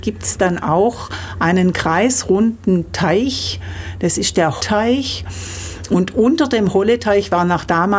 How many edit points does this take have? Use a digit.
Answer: 1